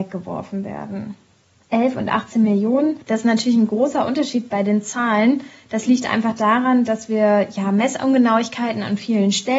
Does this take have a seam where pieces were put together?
yes; 1 cut; at 3.0 s

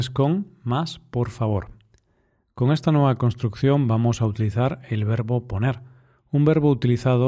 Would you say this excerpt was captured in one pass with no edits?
yes; 0 cuts

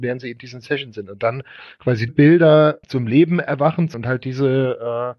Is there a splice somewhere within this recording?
yes; 3 cuts; at 2.1 s, 2.8 s, 3.9 s

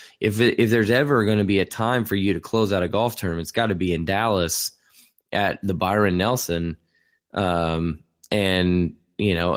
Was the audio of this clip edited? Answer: no; 0 cuts

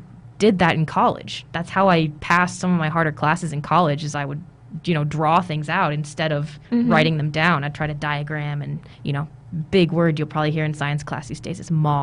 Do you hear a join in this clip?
yes; 3 cuts; at 2.2 s, 6.6 s, 8.9 s

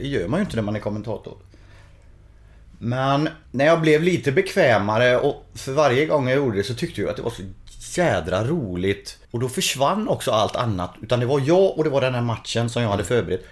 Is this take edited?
yes; 2 cuts; at 3.5 s, 9.2 s

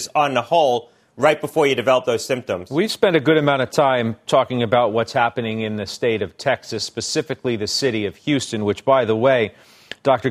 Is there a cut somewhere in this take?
no; 0 cuts

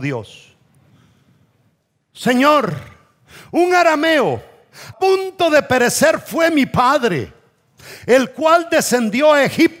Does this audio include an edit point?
yes; 1 cut; at 4.9 s

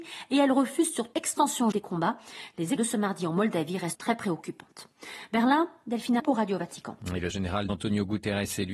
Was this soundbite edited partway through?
yes; 7 cuts; at 1.1 s, 1.7 s, 2.8 s, 3.9 s, 6.2 s, 7.3 s, 7.7 s

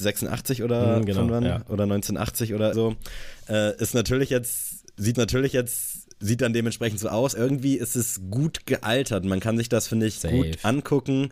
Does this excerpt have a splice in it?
yes; 3 cuts; at 2.7 s, 5.1 s, 7.3 s

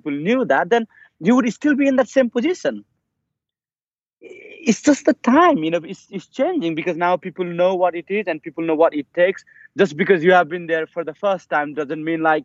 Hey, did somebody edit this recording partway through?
no; 0 cuts

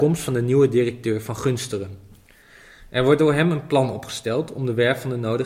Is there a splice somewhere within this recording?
no; 0 cuts

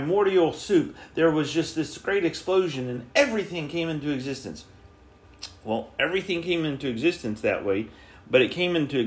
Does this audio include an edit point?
no; 0 cuts

